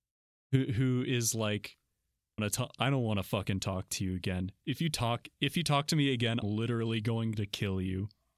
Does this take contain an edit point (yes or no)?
yes